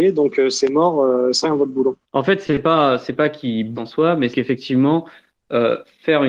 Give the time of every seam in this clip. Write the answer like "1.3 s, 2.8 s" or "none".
1.4 s, 2.0 s, 3.2 s, 3.7 s, 4.3 s